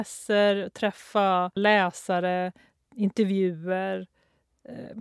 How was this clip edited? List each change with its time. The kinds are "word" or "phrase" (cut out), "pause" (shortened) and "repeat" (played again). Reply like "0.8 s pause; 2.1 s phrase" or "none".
1.6 s word